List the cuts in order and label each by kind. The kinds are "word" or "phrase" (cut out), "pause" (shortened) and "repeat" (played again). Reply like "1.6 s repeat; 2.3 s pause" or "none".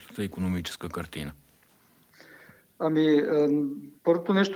none